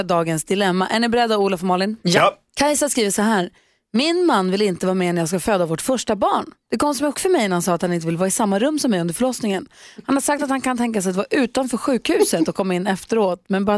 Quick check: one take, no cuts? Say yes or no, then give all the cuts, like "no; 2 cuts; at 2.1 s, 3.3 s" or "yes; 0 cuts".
no; 2 cuts; at 2.5 s, 7.1 s